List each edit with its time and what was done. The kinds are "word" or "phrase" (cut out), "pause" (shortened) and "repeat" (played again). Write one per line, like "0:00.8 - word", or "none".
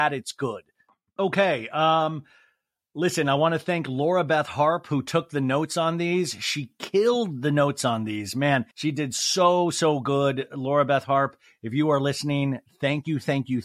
0:08.7 - pause

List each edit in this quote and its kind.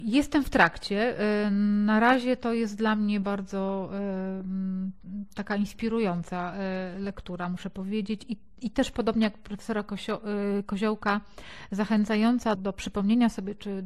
0:03.2 - word
0:12.5 - word

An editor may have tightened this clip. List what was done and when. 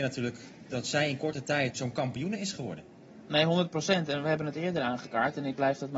0:01.7 - word

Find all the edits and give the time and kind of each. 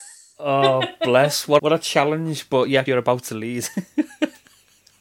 0:01.6 - word
0:02.9 - phrase

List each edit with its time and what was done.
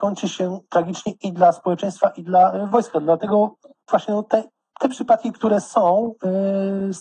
none

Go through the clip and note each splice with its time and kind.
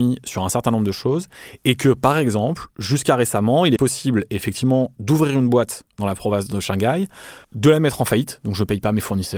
0:03.8 - word
0:07.4 - pause

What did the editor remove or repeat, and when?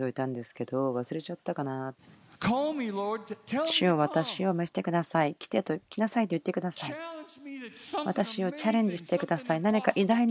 0:02.0 - pause

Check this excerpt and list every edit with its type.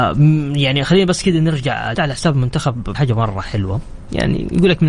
0:01.9 - word
0:02.9 - word

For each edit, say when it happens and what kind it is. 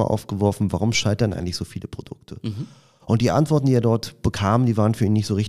none

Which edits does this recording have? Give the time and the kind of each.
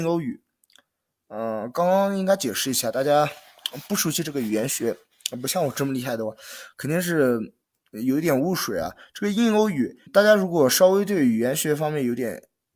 0:07.6 - pause
0:10.1 - word

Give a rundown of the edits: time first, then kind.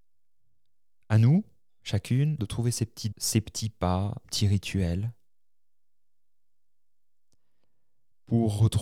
0:02.4 - word
0:03.1 - word
0:04.2 - word

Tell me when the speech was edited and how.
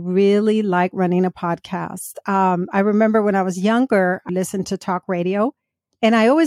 0:04.3 - word

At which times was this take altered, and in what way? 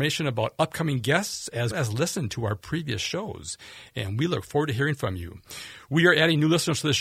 0:01.7 - word

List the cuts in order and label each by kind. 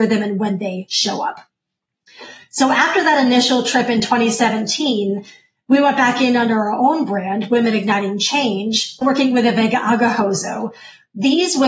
0:09.0 - word

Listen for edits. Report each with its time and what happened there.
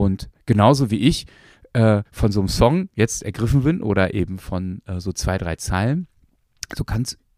0:02.0 - pause

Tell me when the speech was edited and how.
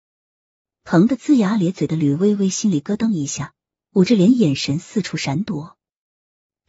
none

